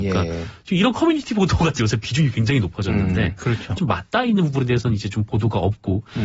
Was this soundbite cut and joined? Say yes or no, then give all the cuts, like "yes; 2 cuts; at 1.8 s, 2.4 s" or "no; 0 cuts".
yes; 2 cuts; at 1.8 s, 3.8 s